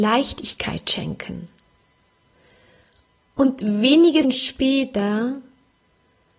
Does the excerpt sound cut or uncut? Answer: cut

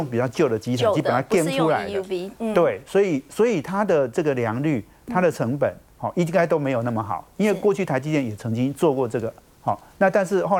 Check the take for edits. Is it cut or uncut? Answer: uncut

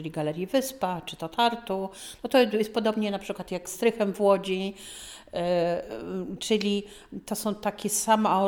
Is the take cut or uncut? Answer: cut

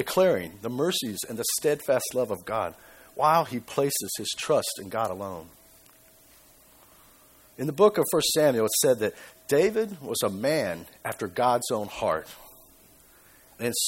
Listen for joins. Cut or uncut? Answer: uncut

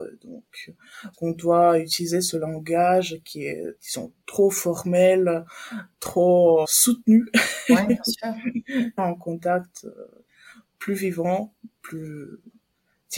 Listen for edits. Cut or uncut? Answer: cut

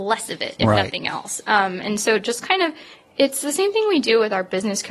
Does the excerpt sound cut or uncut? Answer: uncut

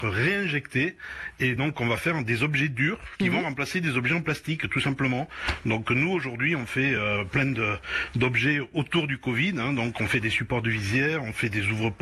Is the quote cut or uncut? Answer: uncut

